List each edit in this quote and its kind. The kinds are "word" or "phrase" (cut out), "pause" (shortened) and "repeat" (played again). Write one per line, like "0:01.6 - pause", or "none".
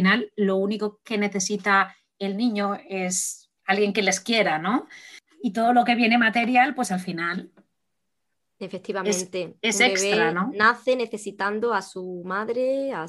0:03.6 - pause